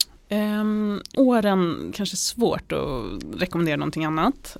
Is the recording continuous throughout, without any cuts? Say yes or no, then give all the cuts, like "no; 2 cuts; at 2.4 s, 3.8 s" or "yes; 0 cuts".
no; 2 cuts; at 1.1 s, 1.9 s